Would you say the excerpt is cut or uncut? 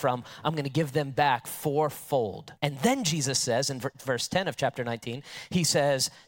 cut